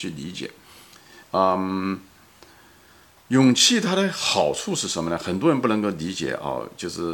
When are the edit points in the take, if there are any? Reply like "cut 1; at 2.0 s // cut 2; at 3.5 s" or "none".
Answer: cut 1; at 1.2 s